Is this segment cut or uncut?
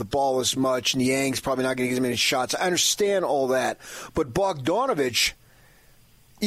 uncut